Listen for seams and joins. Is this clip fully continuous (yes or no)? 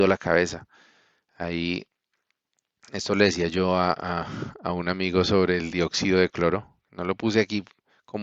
yes